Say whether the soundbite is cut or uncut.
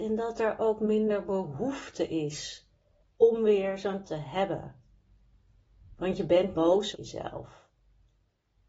cut